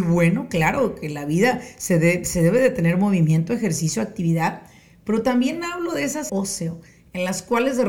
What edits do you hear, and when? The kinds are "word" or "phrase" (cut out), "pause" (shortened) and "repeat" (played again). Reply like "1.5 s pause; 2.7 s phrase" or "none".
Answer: 6.3 s phrase